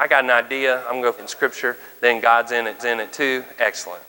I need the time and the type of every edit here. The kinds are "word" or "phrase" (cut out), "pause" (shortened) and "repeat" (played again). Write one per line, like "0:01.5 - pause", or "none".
0:01.2 - word
0:02.8 - repeat